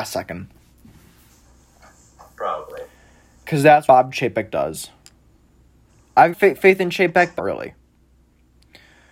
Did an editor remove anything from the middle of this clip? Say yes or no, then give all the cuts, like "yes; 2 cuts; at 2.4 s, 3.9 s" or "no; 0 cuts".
yes; 3 cuts; at 3.9 s, 6.3 s, 7.4 s